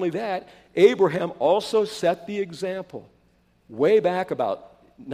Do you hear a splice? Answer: no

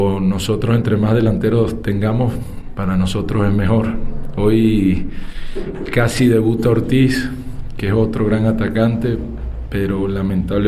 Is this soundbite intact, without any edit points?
yes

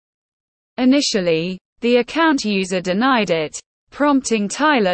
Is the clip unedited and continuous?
yes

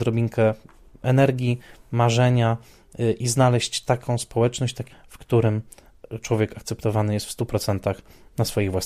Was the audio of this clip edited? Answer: yes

